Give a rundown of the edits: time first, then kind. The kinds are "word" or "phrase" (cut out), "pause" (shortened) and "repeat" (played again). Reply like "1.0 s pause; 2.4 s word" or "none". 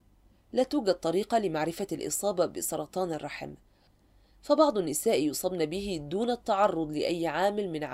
1.9 s word